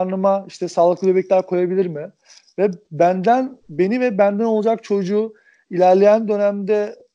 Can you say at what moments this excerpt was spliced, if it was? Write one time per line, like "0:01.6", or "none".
none

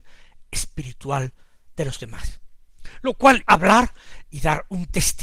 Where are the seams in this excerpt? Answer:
0:03.4

